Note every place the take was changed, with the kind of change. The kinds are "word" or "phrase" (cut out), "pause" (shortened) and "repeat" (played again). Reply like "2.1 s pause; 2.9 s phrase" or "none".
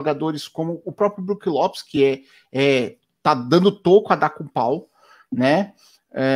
none